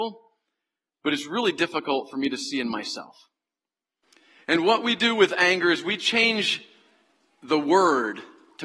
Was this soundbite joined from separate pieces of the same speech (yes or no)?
no